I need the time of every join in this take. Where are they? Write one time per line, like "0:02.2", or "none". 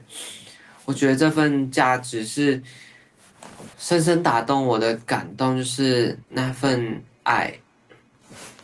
0:03.7
0:06.2